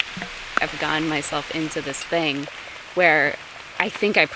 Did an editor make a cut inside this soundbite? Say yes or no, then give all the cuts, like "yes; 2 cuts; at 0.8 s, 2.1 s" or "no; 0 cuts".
no; 0 cuts